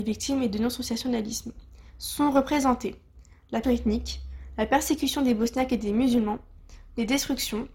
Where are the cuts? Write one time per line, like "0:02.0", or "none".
0:01.9
0:03.6